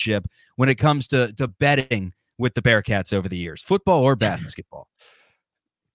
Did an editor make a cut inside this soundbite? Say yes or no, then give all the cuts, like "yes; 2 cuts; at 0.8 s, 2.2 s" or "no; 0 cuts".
no; 0 cuts